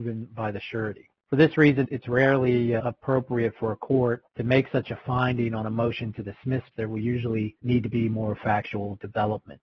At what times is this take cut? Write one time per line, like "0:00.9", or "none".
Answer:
0:01.2
0:01.8
0:02.8
0:04.3
0:06.7
0:07.6